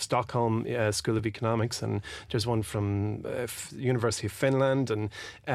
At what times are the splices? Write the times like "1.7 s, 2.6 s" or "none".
none